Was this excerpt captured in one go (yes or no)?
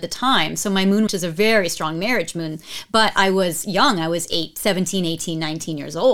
no